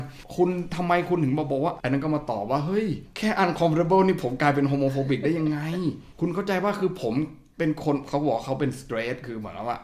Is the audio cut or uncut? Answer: cut